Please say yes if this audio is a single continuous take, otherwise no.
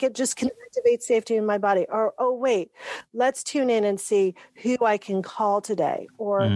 yes